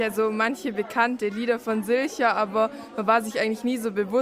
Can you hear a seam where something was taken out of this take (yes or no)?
no